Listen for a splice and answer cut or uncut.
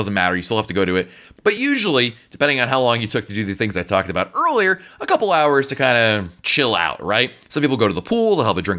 uncut